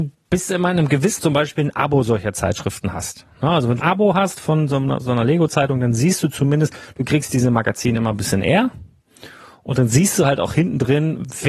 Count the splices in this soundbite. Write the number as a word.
two